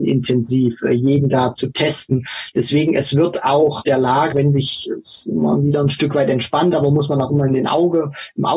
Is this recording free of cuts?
no; 3 cuts; at 1.5 s, 3.8 s, 4.3 s

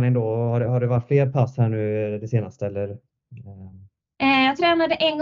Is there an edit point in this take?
no; 0 cuts

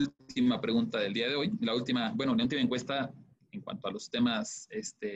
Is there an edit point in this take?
no; 0 cuts

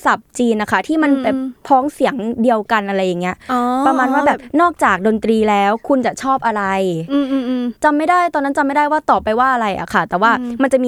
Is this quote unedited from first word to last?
no; 1 cut; at 7.8 s

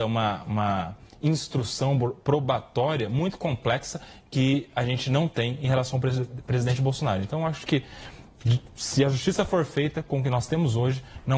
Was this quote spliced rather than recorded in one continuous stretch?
no; 0 cuts

